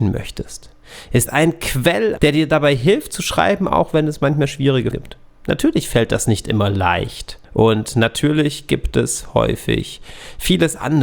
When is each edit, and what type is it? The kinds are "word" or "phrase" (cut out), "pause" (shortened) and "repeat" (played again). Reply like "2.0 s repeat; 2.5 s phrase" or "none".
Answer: 1.3 s word; 2.2 s phrase; 4.9 s word; 7.4 s pause